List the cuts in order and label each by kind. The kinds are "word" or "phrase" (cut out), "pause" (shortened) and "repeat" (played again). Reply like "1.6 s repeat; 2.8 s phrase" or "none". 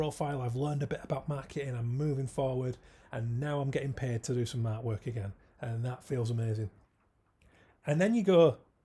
none